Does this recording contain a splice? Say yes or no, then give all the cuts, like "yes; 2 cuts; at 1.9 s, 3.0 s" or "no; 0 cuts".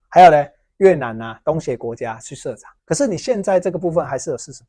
yes; 1 cut; at 2.8 s